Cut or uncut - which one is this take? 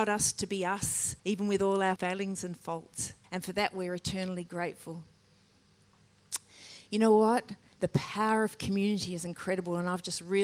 cut